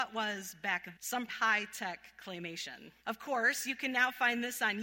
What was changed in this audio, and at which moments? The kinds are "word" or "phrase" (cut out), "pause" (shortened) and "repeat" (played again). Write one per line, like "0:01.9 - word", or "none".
0:00.9 - word
0:01.3 - word
0:03.0 - pause